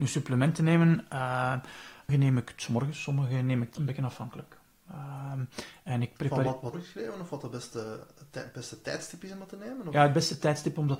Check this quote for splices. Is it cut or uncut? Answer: cut